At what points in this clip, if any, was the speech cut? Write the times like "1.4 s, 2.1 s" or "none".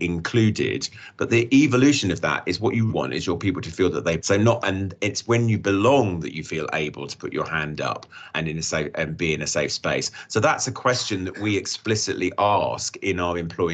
2.9 s, 4.2 s, 4.6 s, 8.3 s